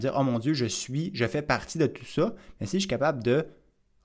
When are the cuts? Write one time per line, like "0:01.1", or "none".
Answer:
none

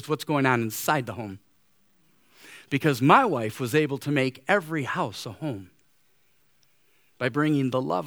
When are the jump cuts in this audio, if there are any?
none

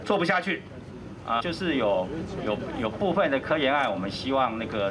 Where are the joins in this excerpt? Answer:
0:01.4

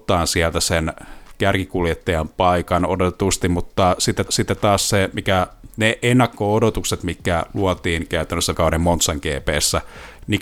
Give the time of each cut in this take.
0:04.3
0:08.5

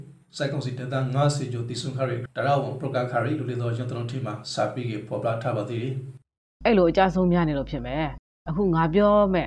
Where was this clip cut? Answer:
0:02.3

